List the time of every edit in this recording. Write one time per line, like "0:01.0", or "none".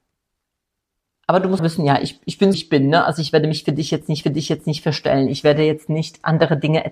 0:01.6
0:02.5
0:04.2